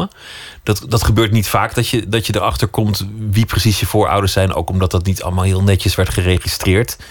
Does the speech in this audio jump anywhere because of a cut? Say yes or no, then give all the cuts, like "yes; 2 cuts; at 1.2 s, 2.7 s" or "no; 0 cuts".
no; 0 cuts